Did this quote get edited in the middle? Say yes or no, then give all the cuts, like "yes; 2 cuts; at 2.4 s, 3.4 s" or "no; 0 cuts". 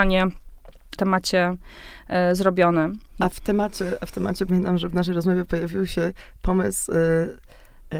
yes; 3 cuts; at 1.0 s, 3.1 s, 4.5 s